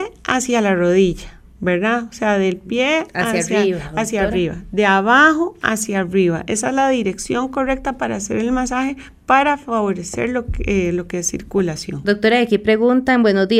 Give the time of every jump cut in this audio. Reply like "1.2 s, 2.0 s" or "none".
none